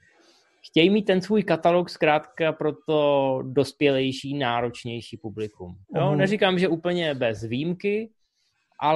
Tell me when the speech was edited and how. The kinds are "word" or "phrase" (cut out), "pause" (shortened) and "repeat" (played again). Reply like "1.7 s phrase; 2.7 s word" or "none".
5.8 s pause